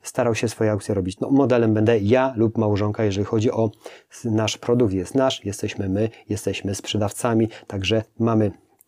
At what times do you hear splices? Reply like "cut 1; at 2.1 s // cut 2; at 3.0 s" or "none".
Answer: cut 1; at 1.2 s

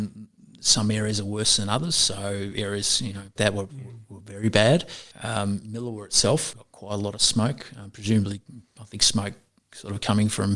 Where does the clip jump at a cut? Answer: cut 1; at 3.4 s // cut 2; at 5.1 s // cut 3; at 6.5 s // cut 4; at 8.7 s

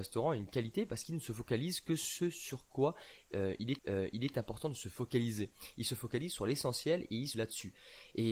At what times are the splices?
cut 1; at 3.8 s // cut 2; at 7.3 s

